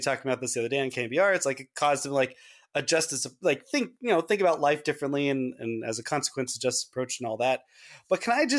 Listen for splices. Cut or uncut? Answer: uncut